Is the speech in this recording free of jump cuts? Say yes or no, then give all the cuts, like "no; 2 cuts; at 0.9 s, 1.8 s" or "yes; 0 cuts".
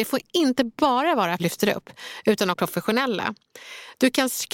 no; 2 cuts; at 1.4 s, 2.5 s